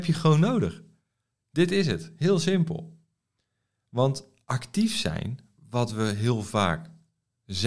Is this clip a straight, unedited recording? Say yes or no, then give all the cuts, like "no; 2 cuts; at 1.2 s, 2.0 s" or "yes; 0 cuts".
yes; 0 cuts